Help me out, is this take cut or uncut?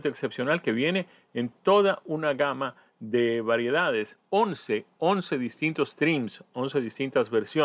uncut